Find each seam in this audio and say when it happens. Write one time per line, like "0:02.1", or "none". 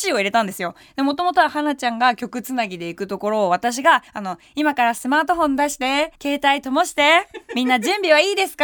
0:04.1
0:06.2